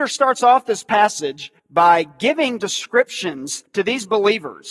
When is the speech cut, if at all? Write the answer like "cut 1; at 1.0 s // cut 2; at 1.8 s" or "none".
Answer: cut 1; at 1.6 s // cut 2; at 3.7 s